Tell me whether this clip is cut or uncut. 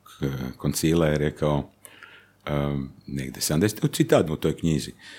cut